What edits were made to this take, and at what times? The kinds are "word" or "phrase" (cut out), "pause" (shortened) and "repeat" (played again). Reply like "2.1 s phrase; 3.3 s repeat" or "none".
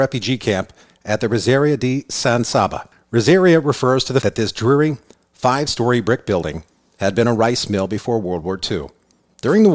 4.2 s word